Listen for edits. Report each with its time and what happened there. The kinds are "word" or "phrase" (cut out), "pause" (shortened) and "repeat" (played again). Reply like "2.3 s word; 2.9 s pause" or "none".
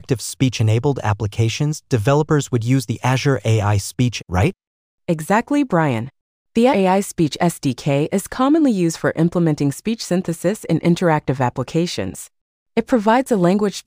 4.2 s word; 6.7 s word